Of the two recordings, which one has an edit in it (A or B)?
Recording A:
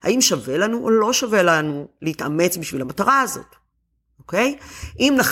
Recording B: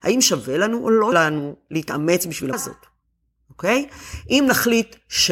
B